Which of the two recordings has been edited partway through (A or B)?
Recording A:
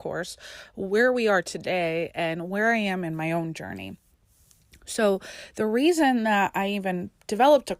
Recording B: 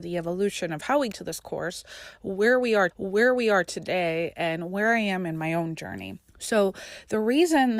B